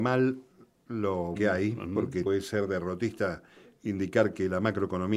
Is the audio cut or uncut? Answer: cut